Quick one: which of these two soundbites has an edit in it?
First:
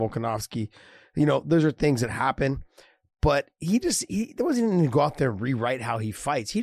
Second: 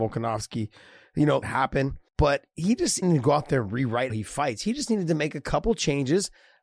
second; 4 cuts; at 1.4 s, 2.1 s, 3.0 s, 4.1 s

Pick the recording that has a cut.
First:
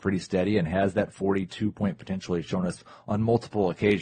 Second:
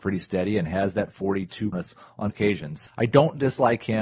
second; 3 cuts; at 1.7 s, 2.3 s, 2.9 s

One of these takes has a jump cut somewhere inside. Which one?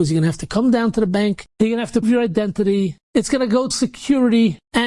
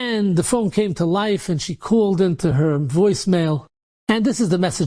first; 4 cuts; at 1.5 s, 2.0 s, 3.0 s, 3.7 s

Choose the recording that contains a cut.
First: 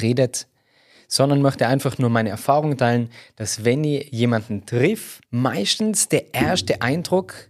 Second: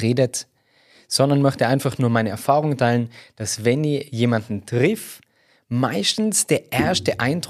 first; 1 cut; at 5.2 s

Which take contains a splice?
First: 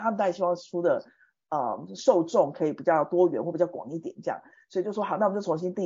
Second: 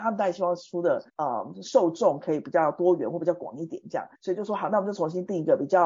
second; 2 cuts; at 1.1 s, 4.1 s

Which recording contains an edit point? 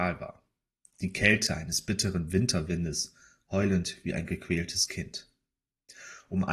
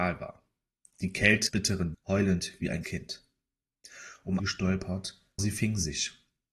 second; 5 cuts; at 1.5 s, 1.9 s, 2.8 s, 4.4 s, 5.4 s

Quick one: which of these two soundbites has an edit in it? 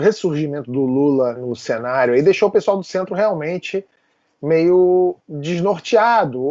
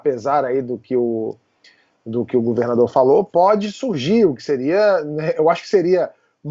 first; 1 cut; at 1.3 s

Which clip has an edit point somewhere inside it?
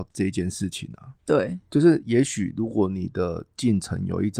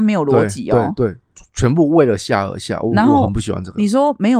first; 1 cut; at 1.2 s

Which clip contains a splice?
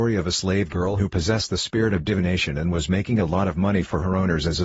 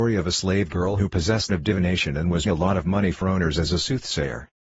second; 3 cuts; at 1.5 s, 2.5 s, 3.2 s

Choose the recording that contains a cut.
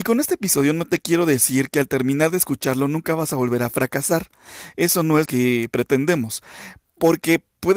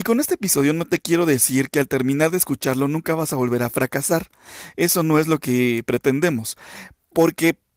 first; 1 cut; at 5.2 s

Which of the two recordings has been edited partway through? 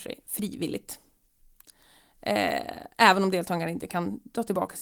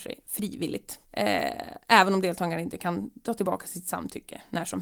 second; 1 cut; at 1.0 s

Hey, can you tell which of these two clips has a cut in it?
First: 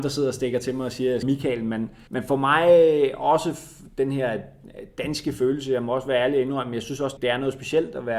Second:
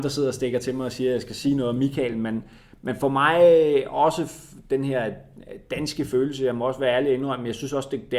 first; 3 cuts; at 1.2 s, 2.1 s, 7.2 s

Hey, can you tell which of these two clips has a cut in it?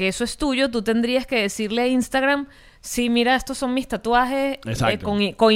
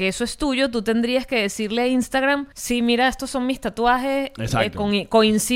second; 1 cut; at 2.5 s

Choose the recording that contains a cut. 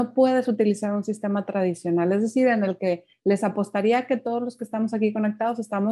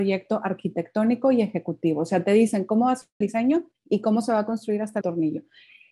second; 2 cuts; at 3.2 s, 5.0 s

